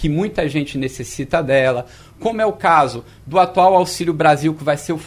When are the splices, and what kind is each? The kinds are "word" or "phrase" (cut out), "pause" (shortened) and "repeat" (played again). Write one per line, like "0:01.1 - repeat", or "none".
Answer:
none

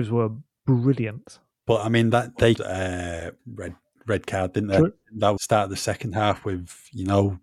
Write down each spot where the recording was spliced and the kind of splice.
0:02.6 - phrase
0:03.4 - pause
0:05.4 - word

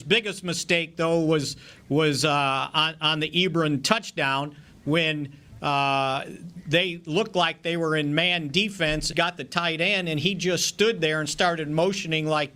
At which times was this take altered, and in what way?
0:09.1 - phrase

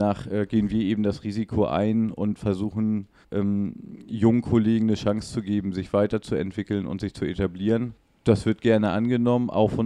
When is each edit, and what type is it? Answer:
0:03.2 - pause

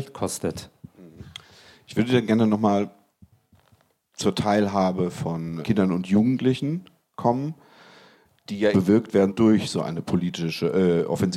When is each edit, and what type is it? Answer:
0:05.6 - word
0:08.7 - word
0:09.3 - word

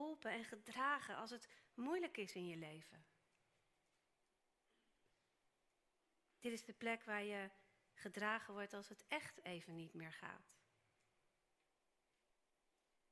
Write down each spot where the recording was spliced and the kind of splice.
none

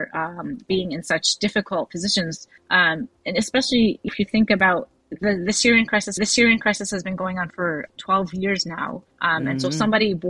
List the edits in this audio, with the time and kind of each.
0:02.6 - pause
0:04.1 - word
0:05.0 - pause
0:06.2 - repeat
0:07.5 - word
0:07.9 - word
0:09.1 - pause

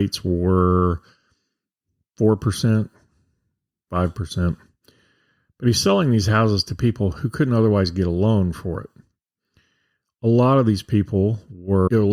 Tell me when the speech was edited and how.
none

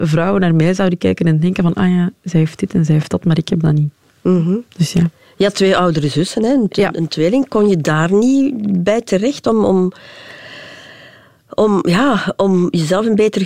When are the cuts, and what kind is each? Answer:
none

